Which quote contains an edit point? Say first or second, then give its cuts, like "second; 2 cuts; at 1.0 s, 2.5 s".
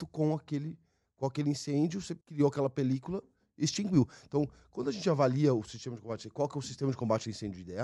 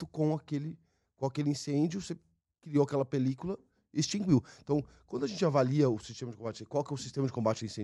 first; 1 cut; at 2.2 s